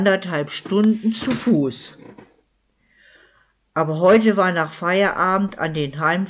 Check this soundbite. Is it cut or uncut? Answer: uncut